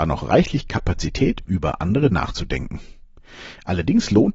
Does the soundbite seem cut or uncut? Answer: cut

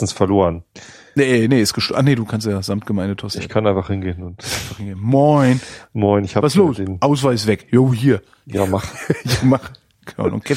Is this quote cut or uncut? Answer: uncut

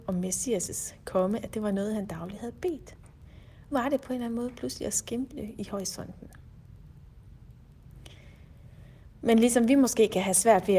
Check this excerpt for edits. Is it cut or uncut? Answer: cut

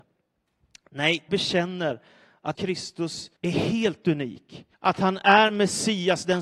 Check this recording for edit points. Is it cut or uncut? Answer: cut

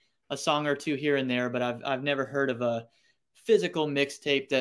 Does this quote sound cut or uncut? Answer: uncut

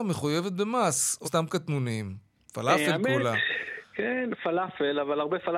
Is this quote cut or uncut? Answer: cut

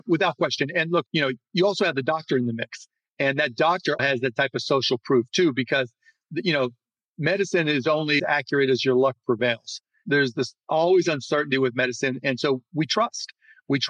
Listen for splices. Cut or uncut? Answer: cut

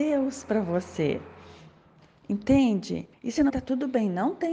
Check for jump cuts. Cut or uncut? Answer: cut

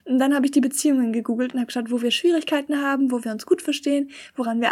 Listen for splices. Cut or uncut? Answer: uncut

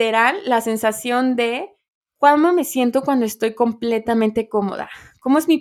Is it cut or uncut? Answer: uncut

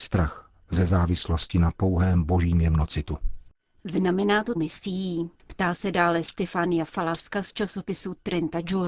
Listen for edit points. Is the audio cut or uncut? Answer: cut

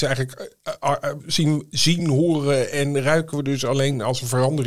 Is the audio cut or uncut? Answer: uncut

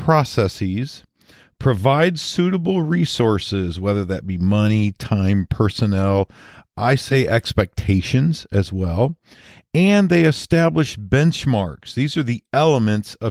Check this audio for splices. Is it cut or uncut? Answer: uncut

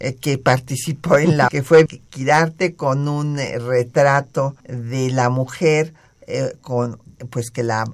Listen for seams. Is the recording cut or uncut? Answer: cut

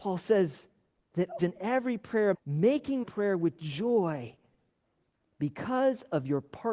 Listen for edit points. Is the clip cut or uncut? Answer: cut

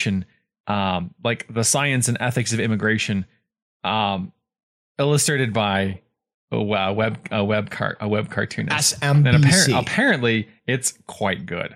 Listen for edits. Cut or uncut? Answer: uncut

